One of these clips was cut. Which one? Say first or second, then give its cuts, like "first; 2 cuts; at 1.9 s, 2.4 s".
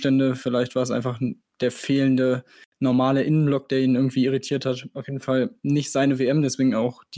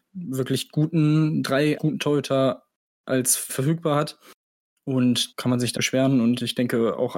second; 4 cuts; at 1.8 s, 3.5 s, 5.3 s, 5.8 s